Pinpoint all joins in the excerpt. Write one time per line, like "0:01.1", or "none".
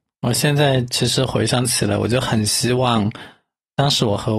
none